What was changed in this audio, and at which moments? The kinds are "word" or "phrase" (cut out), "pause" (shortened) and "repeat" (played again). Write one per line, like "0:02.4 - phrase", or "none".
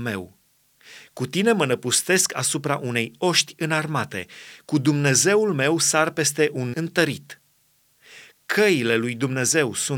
0:06.7 - word